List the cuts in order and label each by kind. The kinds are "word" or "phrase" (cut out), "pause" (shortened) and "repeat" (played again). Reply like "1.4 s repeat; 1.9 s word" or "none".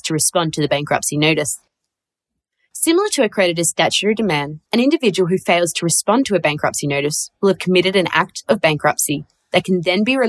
4.7 s pause